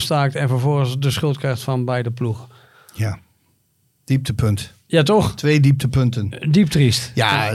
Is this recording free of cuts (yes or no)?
yes